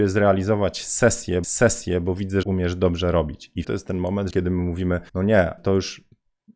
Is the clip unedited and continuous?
no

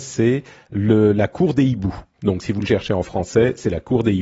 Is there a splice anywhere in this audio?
no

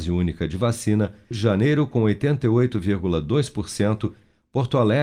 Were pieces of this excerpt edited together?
yes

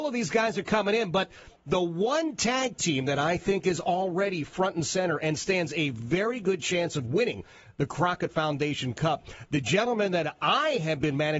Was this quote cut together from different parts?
no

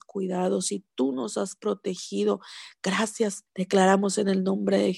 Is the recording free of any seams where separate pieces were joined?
no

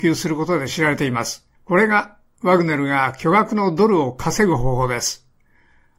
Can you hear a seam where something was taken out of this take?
yes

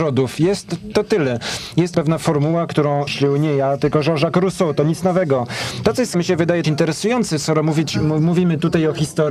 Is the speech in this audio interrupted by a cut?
yes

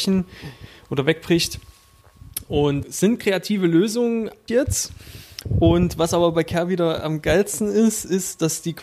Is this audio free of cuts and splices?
no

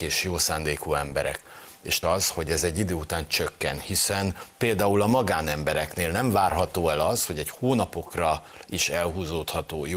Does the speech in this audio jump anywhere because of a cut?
yes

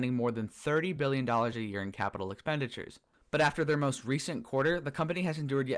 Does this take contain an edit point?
no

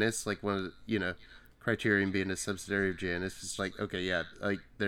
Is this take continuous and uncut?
no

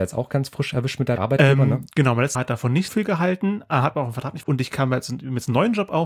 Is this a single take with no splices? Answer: no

